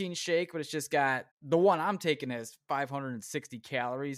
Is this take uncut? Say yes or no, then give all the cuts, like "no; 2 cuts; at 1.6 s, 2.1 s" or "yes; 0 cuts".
no; 1 cut; at 1.3 s